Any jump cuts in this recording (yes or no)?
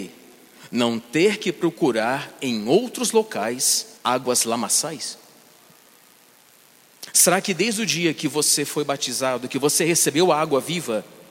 yes